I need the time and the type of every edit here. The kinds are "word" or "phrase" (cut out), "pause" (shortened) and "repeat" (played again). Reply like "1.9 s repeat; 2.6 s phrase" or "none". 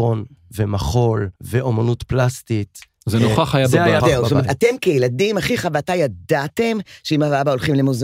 1.4 s pause; 4.0 s phrase